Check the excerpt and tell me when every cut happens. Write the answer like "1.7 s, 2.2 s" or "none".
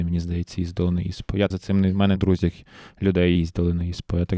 1.5 s, 2.2 s, 3.4 s